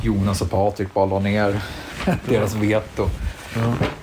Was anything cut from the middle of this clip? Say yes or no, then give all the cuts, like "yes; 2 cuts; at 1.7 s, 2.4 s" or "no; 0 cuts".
no; 0 cuts